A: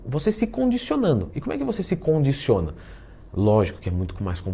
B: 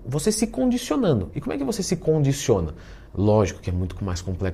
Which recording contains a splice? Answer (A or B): B